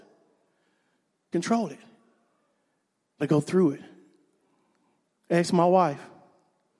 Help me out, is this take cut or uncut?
cut